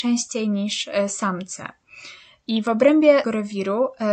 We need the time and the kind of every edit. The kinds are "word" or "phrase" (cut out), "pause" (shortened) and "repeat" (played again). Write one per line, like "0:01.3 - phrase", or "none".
0:03.2 - word